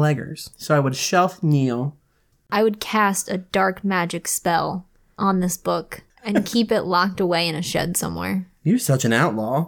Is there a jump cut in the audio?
no; 0 cuts

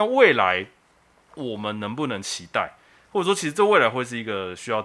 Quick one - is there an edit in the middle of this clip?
no; 0 cuts

